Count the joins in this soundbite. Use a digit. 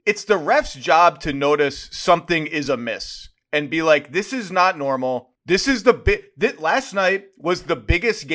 1